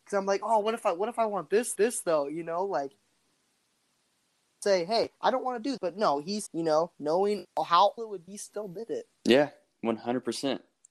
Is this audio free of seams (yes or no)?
no